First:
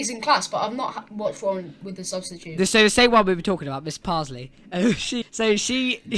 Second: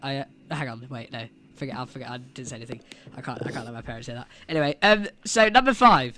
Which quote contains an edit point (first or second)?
first